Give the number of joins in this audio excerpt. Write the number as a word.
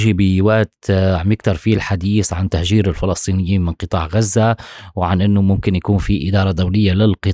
zero